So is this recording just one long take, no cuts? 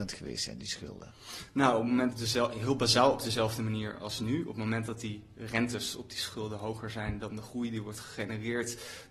no; 1 cut; at 2.1 s

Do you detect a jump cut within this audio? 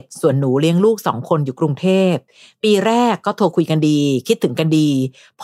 no; 0 cuts

